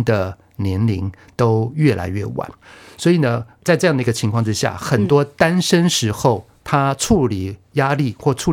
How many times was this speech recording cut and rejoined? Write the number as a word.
zero